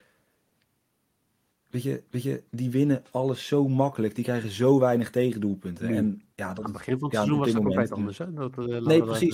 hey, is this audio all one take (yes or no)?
no